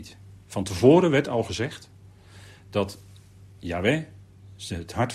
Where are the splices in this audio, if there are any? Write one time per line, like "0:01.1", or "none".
none